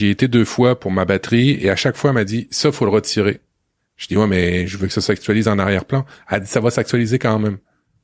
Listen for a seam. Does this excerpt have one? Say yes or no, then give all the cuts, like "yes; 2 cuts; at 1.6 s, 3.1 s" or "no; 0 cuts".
no; 0 cuts